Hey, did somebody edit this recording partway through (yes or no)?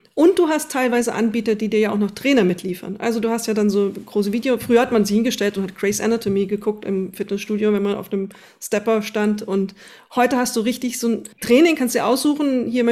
yes